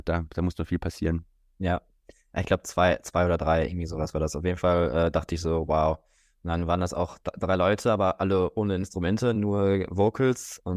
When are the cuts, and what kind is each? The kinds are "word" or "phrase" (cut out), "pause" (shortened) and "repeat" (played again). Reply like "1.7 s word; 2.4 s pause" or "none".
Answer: none